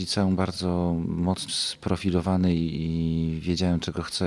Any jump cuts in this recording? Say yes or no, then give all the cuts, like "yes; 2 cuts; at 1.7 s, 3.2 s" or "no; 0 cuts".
yes; 1 cut; at 1.5 s